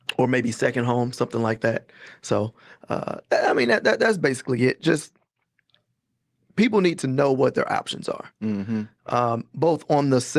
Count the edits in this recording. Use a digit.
0